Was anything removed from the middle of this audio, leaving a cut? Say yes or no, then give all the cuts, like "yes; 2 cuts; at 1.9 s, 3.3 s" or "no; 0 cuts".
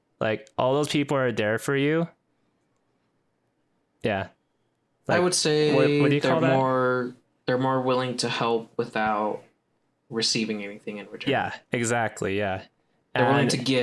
no; 0 cuts